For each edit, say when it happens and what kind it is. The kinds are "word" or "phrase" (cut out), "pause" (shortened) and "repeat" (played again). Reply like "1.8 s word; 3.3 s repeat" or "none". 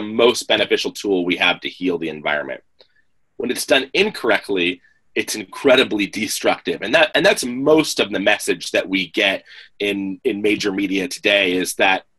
none